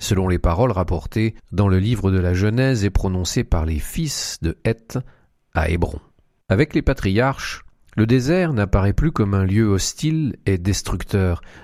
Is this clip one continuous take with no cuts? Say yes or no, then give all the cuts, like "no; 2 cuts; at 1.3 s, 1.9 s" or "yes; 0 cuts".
yes; 0 cuts